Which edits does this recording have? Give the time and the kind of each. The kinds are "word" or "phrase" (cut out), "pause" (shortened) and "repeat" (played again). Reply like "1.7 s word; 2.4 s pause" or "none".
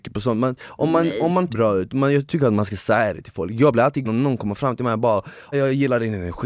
1.5 s phrase; 4.0 s word; 5.5 s word